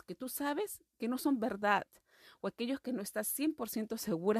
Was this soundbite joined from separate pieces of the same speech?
no; 0 cuts

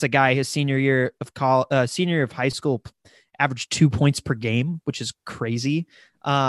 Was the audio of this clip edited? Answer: no; 0 cuts

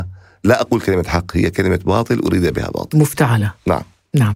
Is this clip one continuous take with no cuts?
yes; 0 cuts

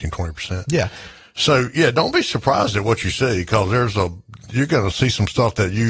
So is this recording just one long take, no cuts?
yes; 0 cuts

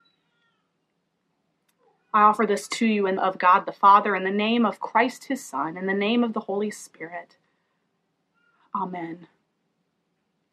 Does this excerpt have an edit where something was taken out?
yes; 1 cut; at 3.2 s

